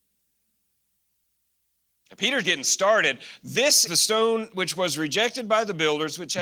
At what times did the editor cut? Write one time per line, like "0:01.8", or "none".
0:02.4
0:03.9